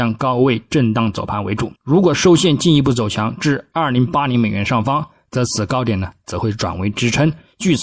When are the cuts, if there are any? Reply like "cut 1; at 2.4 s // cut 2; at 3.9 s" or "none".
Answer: cut 1; at 1.8 s